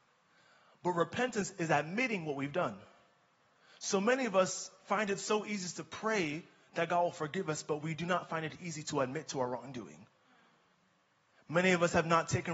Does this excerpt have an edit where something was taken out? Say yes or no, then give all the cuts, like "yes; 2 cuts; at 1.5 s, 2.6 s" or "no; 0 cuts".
no; 0 cuts